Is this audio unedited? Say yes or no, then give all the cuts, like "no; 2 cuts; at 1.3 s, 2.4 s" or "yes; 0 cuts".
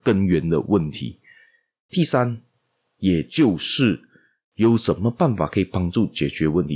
yes; 0 cuts